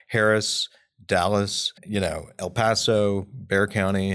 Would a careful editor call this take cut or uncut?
cut